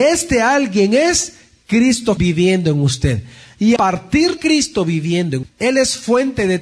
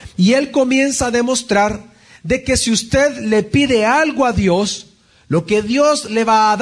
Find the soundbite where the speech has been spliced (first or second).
first